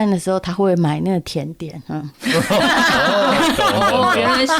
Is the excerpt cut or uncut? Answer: cut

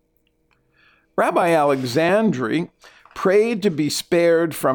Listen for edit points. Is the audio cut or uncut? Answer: uncut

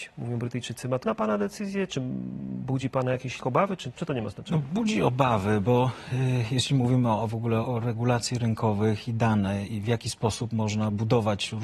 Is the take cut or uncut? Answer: cut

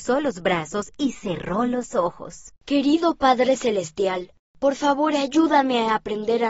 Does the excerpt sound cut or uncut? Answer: cut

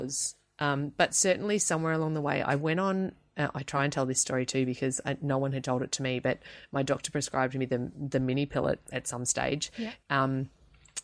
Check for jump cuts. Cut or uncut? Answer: uncut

